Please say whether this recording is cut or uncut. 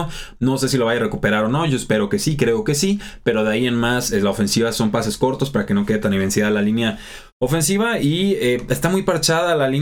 uncut